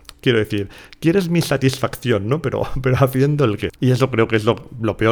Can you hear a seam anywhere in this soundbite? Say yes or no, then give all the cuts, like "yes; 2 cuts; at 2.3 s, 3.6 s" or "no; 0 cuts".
yes; 1 cut; at 3.7 s